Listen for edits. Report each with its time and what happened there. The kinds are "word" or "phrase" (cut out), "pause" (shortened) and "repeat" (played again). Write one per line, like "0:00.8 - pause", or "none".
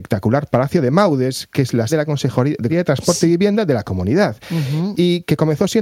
0:01.9 - word
0:02.7 - word